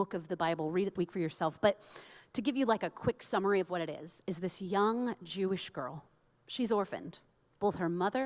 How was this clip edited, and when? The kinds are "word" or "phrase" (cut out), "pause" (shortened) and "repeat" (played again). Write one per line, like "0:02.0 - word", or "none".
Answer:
0:01.0 - word
0:04.2 - word